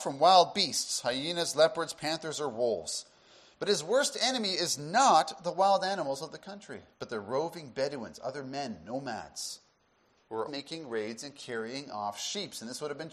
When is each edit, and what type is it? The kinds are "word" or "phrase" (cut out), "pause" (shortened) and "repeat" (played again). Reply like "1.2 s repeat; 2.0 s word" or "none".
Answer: 6.9 s pause; 10.5 s word